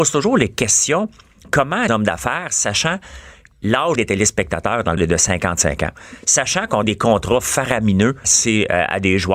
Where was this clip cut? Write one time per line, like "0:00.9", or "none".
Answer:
0:01.9
0:03.5
0:04.0
0:05.0
0:06.8
0:08.2